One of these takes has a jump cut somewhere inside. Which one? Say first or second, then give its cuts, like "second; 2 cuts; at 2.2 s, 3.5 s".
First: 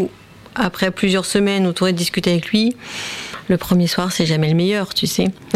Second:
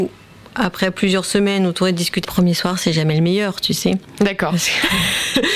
second; 1 cut; at 2.2 s